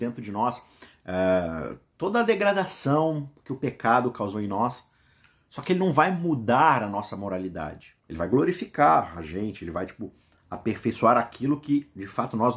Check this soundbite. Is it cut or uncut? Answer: cut